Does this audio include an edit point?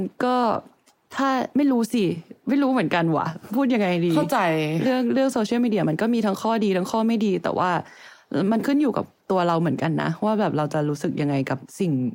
yes; 1 cut; at 1.5 s

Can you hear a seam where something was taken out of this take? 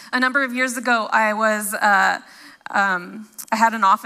no; 0 cuts

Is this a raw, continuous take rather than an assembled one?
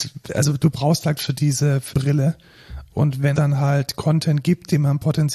no; 3 cuts; at 1.2 s, 1.9 s, 3.3 s

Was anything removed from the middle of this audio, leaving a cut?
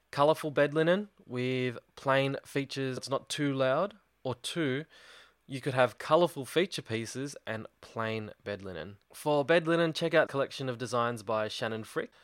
yes; 4 cuts; at 3.0 s, 4.1 s, 9.0 s, 10.3 s

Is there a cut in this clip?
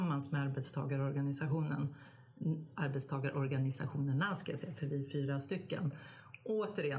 no; 0 cuts

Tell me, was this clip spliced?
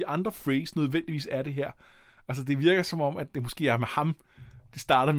no; 0 cuts

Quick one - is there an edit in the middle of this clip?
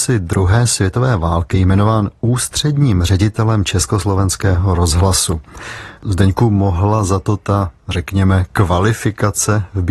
yes; 1 cut; at 1.5 s

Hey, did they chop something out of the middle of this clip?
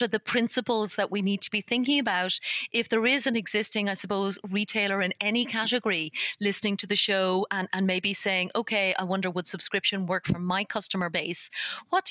no; 0 cuts

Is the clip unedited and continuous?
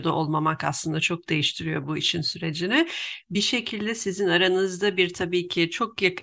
yes; 0 cuts

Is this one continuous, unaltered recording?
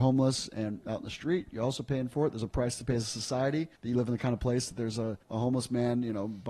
no; 2 cuts; at 3.7 s, 5.2 s

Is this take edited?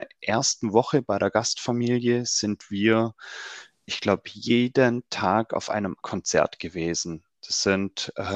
yes; 1 cut; at 6.0 s

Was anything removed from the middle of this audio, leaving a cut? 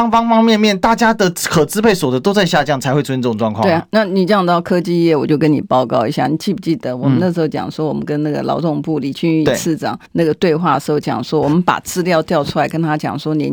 yes; 1 cut; at 10.1 s

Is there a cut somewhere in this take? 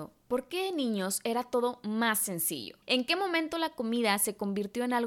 yes; 1 cut; at 2.8 s

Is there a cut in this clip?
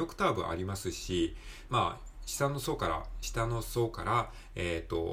yes; 1 cut; at 1.7 s

